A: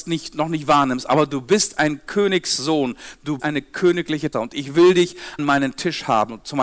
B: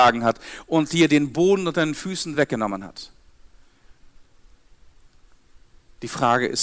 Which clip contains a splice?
A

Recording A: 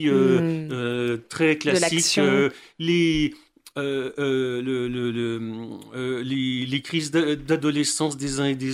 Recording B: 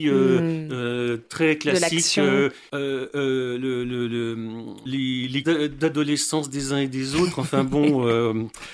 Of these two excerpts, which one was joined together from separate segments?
B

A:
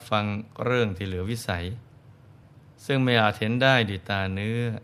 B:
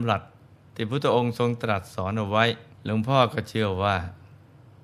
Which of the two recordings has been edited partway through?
B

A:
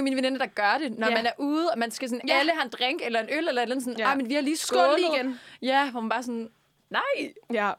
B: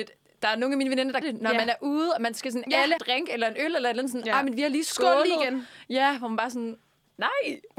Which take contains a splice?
B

